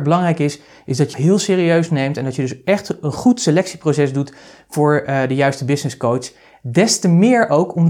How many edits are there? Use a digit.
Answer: 1